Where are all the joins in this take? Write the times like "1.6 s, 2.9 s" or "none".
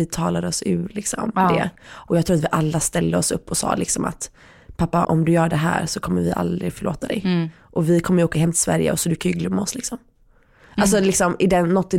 5.0 s